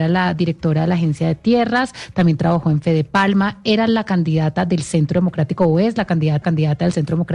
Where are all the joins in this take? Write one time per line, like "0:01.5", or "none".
0:06.4